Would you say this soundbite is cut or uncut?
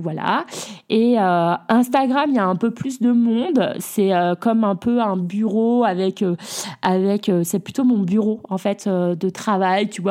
uncut